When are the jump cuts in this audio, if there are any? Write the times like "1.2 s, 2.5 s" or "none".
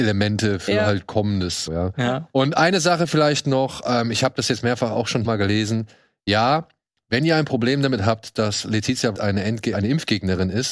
1.7 s, 5.2 s, 9.1 s, 9.7 s